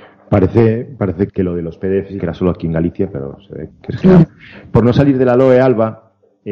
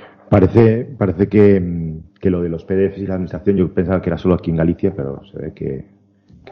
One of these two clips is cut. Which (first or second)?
first